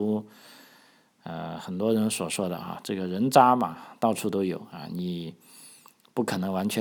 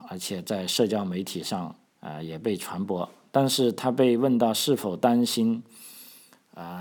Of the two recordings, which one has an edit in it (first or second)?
second